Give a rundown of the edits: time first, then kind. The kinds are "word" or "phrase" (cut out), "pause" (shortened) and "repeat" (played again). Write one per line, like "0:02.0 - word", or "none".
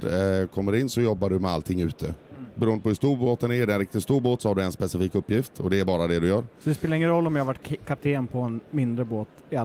none